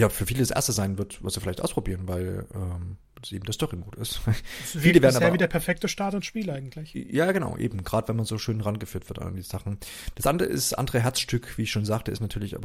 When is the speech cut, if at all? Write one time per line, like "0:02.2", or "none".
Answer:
none